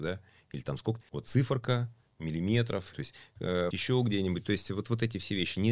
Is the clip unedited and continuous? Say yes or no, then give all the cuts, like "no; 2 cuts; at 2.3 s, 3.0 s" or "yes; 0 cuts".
no; 3 cuts; at 1.0 s, 2.9 s, 3.7 s